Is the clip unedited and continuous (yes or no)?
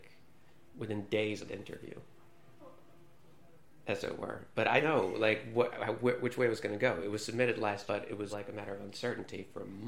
no